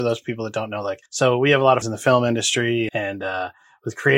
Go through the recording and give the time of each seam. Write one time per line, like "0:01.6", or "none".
0:01.1
0:01.8
0:02.9